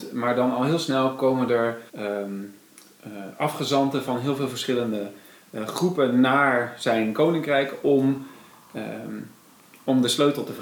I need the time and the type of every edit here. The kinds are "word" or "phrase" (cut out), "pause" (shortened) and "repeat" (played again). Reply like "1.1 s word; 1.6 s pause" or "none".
1.9 s pause